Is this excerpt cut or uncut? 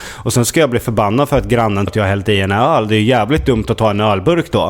cut